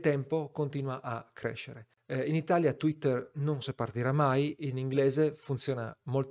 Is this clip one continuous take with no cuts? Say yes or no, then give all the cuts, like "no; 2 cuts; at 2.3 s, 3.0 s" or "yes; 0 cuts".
no; 1 cut; at 3.6 s